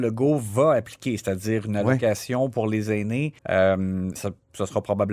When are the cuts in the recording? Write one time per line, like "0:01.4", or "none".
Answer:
0:03.4